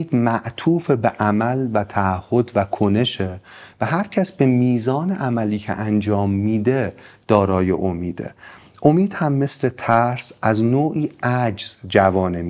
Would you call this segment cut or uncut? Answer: uncut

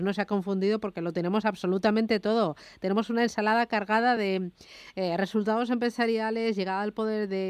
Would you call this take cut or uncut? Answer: uncut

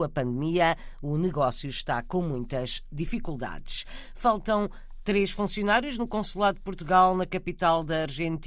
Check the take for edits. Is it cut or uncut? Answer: uncut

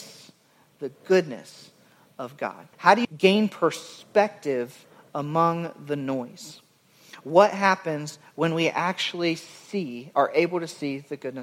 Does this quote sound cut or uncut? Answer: cut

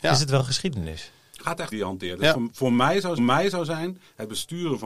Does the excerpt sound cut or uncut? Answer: cut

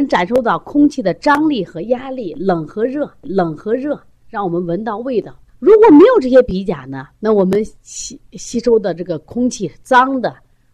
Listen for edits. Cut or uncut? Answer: cut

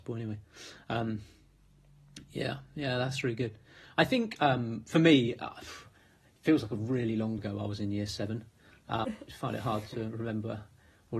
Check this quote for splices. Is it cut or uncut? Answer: cut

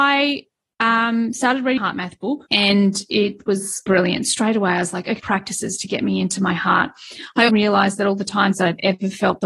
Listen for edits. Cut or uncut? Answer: cut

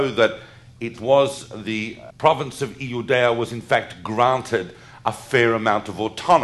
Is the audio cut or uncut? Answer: cut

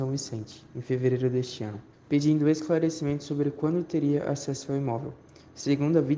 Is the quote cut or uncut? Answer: cut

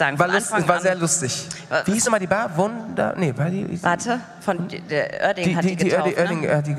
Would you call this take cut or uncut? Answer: uncut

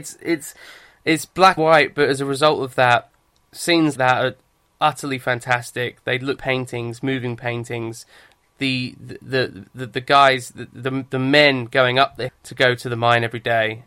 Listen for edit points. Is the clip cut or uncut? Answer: cut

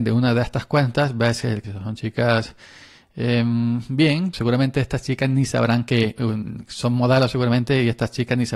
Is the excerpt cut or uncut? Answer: cut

